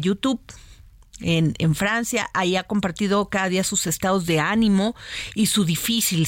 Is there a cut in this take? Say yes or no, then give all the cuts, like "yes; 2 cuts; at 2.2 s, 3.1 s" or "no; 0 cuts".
no; 0 cuts